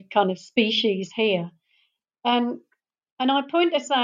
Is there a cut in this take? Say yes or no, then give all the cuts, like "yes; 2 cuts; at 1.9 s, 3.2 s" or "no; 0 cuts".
no; 0 cuts